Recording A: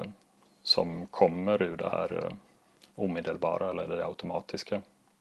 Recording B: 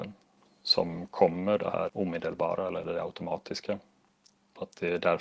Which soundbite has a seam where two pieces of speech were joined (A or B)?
B